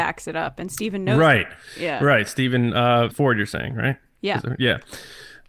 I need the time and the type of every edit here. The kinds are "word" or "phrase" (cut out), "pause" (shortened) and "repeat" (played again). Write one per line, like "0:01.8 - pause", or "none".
0:03.1 - word